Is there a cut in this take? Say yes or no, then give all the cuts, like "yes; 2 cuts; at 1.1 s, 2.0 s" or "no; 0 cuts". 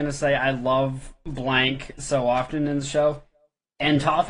no; 0 cuts